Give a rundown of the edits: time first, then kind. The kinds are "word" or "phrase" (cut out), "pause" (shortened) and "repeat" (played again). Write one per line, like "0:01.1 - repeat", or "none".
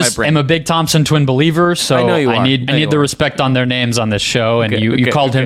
0:02.7 - word